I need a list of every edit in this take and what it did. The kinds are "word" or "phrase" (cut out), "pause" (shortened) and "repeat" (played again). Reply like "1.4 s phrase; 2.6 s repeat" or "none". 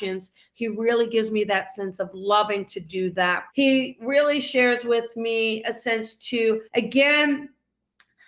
3.5 s pause; 6.7 s pause